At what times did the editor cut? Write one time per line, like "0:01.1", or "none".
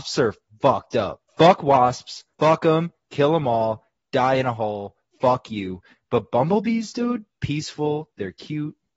0:01.3
0:02.3
0:07.3